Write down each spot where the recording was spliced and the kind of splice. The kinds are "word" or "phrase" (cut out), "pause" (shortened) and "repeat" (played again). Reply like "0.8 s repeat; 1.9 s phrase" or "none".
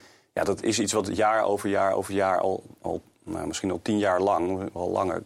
none